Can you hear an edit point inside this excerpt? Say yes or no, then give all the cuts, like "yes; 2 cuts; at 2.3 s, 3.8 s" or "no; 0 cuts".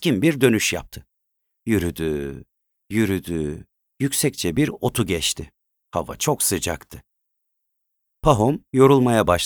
no; 0 cuts